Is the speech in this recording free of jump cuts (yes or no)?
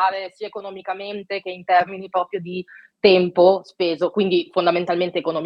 yes